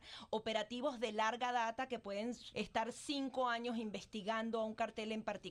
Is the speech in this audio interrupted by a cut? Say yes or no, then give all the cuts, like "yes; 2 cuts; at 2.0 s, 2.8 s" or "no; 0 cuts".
yes; 1 cut; at 2.5 s